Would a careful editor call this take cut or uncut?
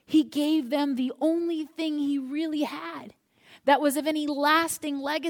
uncut